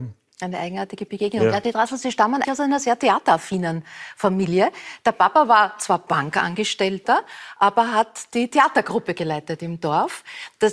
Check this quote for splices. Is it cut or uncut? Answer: cut